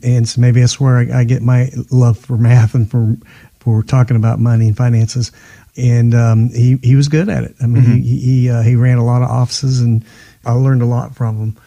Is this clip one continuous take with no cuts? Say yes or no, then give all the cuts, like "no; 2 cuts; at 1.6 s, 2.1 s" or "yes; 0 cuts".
yes; 0 cuts